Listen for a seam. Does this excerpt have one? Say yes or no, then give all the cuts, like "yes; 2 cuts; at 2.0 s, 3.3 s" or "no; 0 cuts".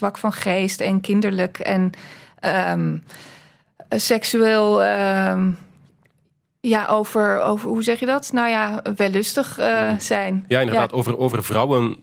no; 0 cuts